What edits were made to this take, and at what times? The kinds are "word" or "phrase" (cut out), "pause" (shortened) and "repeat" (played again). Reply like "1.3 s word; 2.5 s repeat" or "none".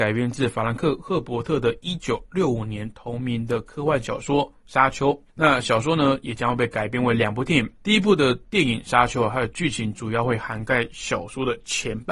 5.3 s pause; 7.8 s pause

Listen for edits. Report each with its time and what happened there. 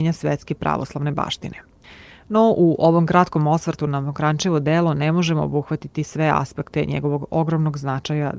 none

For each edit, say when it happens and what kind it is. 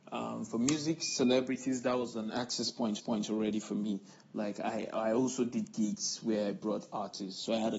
3.0 s repeat

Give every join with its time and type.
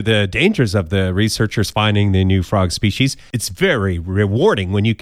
none

